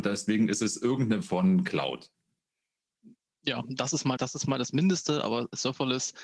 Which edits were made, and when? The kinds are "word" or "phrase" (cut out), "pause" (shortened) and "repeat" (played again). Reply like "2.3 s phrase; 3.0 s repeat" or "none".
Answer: 1.2 s word; 4.2 s word